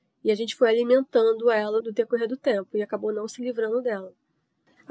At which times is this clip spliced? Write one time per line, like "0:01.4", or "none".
0:01.8